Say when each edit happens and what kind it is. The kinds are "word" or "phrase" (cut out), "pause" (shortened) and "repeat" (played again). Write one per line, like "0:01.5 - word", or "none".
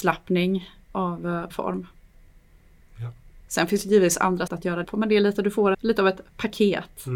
0:01.5 - word
0:04.5 - word
0:04.8 - word
0:05.7 - word